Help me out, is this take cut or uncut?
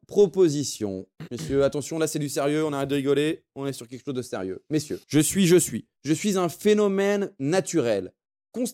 cut